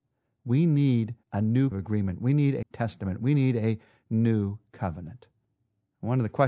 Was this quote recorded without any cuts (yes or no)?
no